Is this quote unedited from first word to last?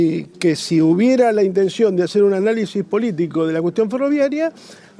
yes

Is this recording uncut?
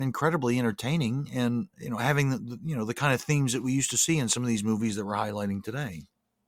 no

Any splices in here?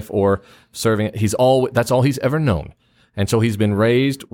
no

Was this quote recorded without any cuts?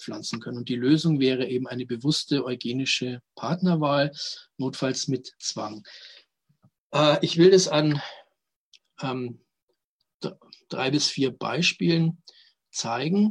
yes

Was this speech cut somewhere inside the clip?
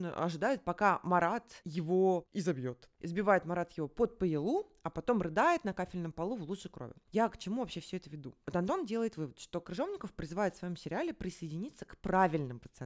no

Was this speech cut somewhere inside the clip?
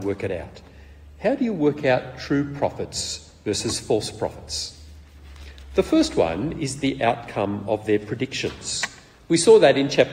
no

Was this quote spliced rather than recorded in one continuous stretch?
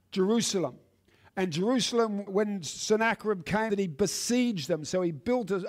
yes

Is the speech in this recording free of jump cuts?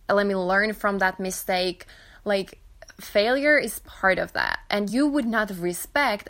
yes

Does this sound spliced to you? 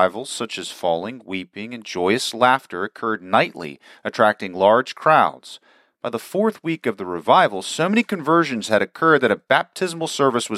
no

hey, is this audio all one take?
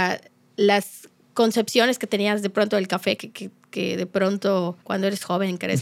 no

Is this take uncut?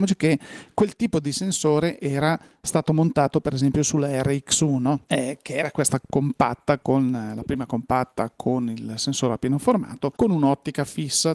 no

